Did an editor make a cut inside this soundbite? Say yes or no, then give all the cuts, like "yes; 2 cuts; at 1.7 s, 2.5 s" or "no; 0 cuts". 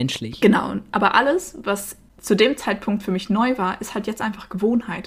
no; 0 cuts